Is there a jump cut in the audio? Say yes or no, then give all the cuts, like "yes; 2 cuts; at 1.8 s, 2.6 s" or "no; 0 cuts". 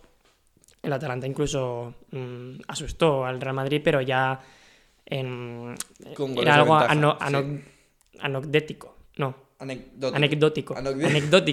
no; 0 cuts